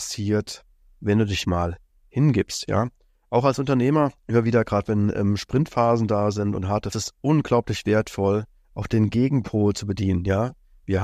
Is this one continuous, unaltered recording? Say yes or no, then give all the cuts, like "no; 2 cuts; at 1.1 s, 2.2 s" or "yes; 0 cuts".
no; 3 cuts; at 1.4 s, 4.2 s, 6.9 s